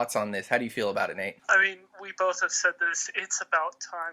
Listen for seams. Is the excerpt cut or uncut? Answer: uncut